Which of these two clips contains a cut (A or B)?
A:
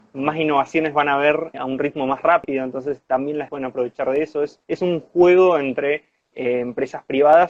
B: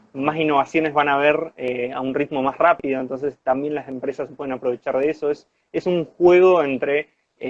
A